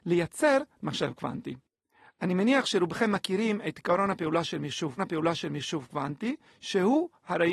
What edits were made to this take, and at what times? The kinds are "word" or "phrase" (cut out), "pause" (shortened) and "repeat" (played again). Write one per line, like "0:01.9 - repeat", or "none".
0:05.0 - repeat